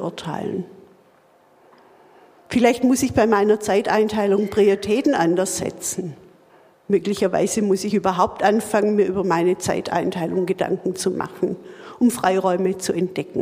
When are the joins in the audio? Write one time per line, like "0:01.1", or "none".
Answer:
none